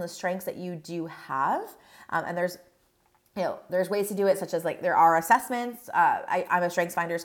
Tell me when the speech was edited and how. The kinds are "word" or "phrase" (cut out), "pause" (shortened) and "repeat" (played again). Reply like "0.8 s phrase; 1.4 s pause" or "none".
none